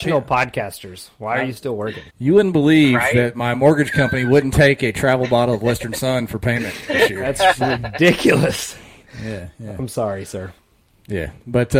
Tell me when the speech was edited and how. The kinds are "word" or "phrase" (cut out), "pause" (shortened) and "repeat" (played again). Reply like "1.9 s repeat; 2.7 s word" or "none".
2.1 s pause